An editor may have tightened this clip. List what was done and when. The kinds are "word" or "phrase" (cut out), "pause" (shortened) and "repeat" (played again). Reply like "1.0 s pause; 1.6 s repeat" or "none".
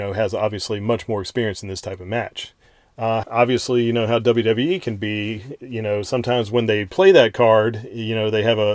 3.2 s word